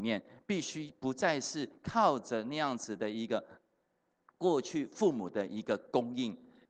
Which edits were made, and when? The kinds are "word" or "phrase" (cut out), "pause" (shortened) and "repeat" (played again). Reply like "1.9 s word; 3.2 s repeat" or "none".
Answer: none